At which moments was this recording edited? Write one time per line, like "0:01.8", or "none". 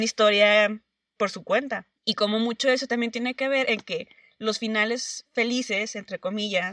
0:02.0